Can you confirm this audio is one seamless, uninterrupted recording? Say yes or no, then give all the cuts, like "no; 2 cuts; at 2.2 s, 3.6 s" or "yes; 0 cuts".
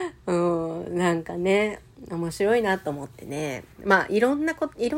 no; 1 cut; at 3.7 s